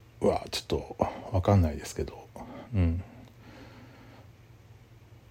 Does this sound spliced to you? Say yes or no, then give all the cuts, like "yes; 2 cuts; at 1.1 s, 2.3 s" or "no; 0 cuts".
yes; 1 cut; at 2.7 s